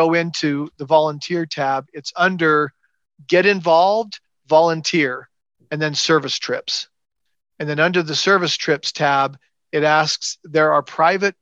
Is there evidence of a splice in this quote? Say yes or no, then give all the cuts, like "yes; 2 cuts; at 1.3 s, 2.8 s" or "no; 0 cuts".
no; 0 cuts